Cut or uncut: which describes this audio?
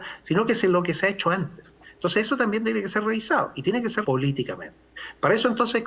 cut